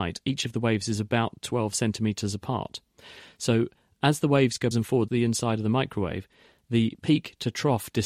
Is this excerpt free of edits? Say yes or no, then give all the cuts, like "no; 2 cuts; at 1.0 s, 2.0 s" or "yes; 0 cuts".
no; 2 cuts; at 4.7 s, 5.1 s